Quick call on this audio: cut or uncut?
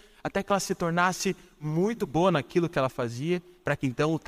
uncut